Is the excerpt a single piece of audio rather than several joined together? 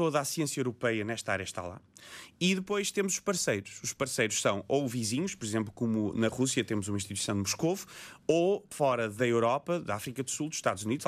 yes; 0 cuts

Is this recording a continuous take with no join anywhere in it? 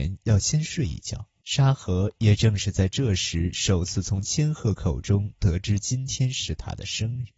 no; 1 cut; at 1.4 s

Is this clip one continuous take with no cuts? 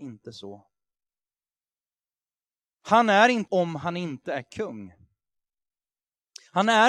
no; 1 cut; at 3.5 s

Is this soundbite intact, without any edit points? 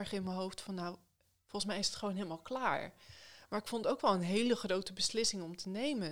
yes; 0 cuts

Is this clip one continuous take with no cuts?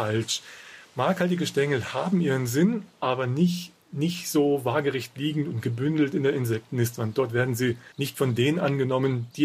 no; 2 cuts; at 3.8 s, 7.9 s

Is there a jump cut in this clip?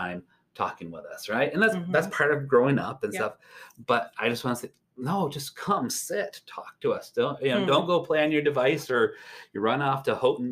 no; 0 cuts

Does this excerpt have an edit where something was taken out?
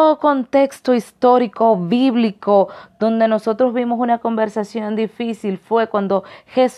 no; 0 cuts

